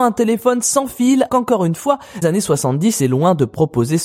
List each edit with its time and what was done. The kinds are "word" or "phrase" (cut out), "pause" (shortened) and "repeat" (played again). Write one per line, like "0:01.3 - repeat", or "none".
0:01.3 - word
0:02.2 - word
0:03.0 - word